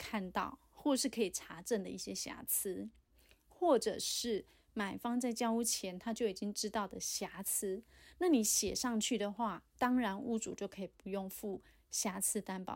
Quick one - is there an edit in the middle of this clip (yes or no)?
no